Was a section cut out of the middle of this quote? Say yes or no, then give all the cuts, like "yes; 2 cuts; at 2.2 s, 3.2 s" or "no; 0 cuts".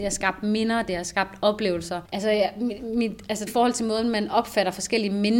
yes; 2 cuts; at 2.1 s, 3.5 s